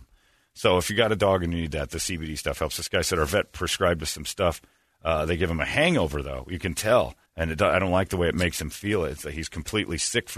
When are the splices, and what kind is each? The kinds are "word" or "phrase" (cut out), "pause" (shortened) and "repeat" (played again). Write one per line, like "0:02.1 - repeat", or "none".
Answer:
0:07.3 - pause